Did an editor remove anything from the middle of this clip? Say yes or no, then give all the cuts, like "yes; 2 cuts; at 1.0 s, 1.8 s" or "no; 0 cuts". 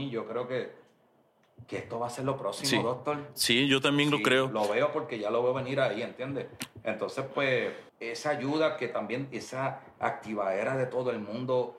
yes; 1 cut; at 7.9 s